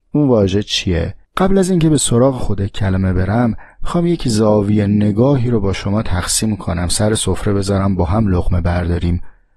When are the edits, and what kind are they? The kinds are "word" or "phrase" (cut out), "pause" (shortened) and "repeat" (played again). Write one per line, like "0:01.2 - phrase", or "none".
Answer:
0:01.2 - pause